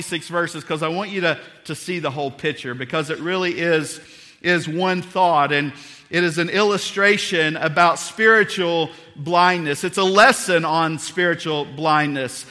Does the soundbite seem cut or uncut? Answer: uncut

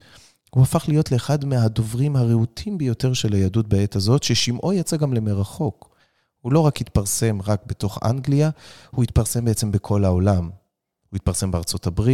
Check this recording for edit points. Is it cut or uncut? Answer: uncut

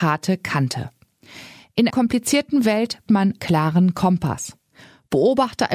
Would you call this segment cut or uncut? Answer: cut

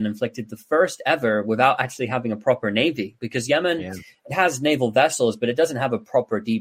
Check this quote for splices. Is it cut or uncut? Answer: uncut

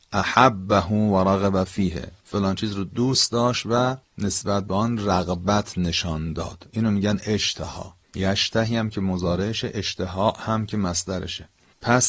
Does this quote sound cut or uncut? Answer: uncut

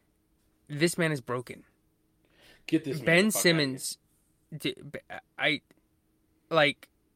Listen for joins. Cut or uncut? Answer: uncut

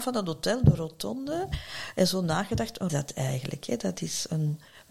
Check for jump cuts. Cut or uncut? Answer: cut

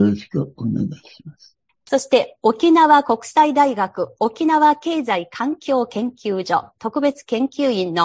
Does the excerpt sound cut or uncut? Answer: uncut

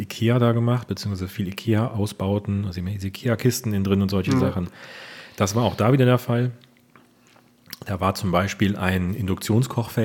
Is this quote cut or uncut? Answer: uncut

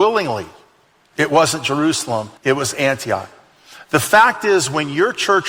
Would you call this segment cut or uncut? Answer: cut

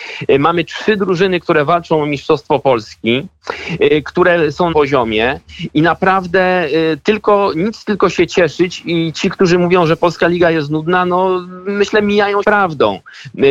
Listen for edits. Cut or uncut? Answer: cut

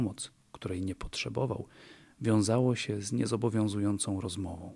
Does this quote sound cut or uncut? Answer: uncut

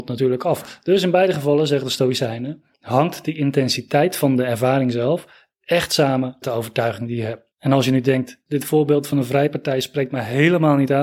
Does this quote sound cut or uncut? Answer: cut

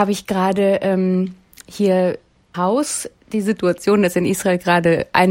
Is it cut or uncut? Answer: cut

